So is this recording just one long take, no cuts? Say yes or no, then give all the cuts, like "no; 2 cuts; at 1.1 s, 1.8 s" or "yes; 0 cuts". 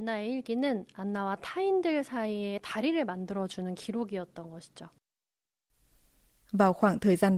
yes; 0 cuts